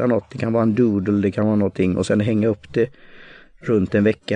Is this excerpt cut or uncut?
uncut